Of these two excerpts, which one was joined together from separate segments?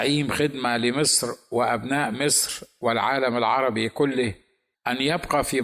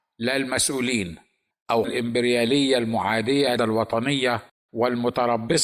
second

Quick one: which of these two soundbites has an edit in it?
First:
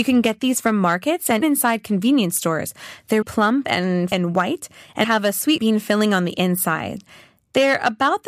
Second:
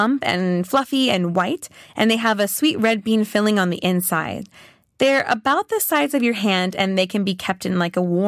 first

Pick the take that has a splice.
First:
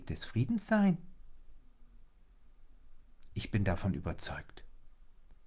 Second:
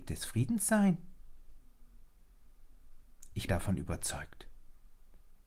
second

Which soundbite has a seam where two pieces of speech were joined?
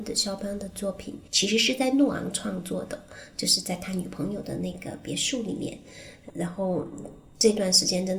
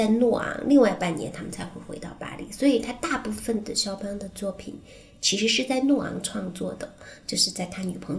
first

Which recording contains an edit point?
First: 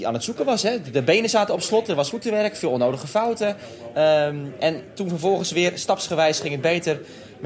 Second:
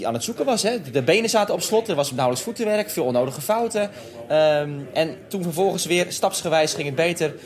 first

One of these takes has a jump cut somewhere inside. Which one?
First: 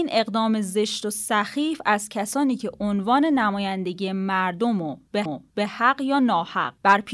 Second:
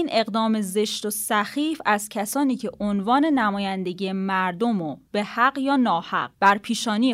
first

